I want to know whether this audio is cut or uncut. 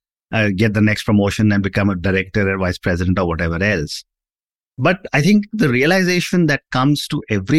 uncut